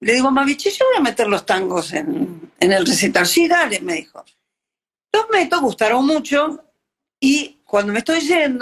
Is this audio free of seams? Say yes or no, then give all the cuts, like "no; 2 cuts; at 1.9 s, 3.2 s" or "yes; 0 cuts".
yes; 0 cuts